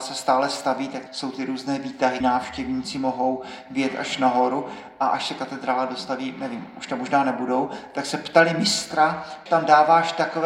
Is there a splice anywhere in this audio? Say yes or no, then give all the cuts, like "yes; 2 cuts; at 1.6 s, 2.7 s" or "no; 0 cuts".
yes; 3 cuts; at 1.1 s, 2.2 s, 9.5 s